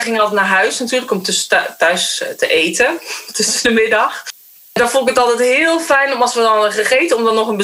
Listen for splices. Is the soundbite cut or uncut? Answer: uncut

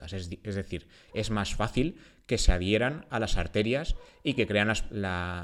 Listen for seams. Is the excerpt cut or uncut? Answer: uncut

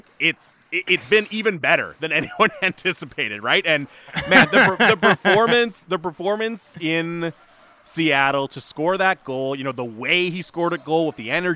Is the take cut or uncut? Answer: uncut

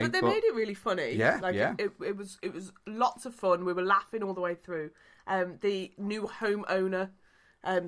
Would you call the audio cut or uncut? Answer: uncut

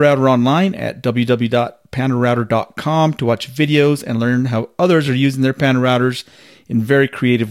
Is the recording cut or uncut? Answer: uncut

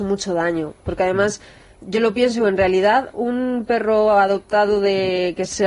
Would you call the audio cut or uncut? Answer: uncut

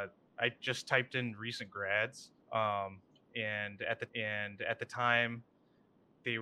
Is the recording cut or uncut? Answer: cut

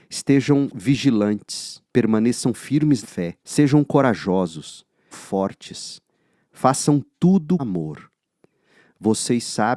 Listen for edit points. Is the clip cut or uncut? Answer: cut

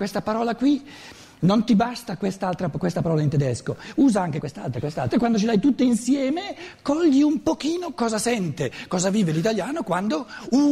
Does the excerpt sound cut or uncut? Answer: cut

